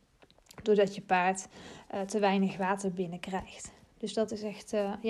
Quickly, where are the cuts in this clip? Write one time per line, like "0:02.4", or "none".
none